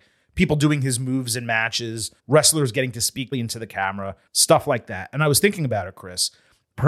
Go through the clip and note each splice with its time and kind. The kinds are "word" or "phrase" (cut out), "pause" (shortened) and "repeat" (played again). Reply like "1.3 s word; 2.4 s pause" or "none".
2.2 s pause; 3.3 s word; 4.3 s pause